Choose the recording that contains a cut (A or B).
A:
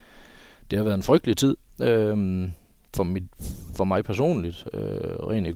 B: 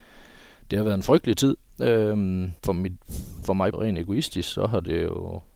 B